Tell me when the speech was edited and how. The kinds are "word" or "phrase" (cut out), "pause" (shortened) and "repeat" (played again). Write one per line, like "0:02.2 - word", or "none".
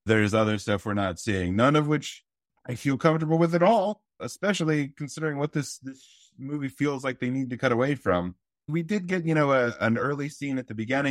none